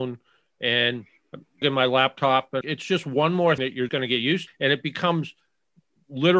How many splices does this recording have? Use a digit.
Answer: 5